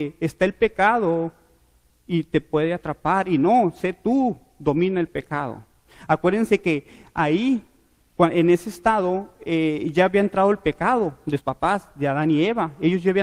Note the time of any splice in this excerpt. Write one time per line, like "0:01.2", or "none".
0:11.4